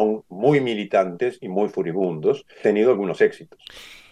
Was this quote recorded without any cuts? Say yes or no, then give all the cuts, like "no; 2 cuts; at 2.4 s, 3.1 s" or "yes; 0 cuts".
no; 1 cut; at 2.6 s